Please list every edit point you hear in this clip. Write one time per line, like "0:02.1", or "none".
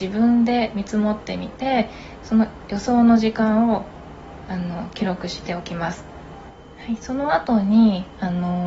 0:06.6